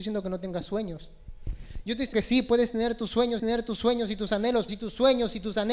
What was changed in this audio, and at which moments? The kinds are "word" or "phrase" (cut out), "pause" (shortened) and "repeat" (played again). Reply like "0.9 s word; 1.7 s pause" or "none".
2.1 s word; 3.4 s repeat; 4.7 s word